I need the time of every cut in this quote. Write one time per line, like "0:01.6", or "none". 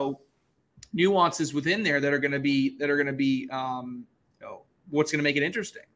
none